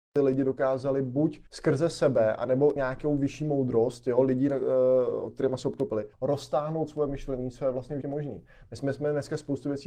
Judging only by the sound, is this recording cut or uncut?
cut